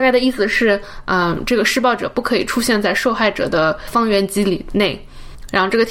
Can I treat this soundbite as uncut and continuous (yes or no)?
yes